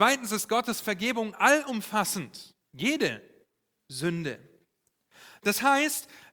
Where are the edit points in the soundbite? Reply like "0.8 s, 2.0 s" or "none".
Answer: 2.6 s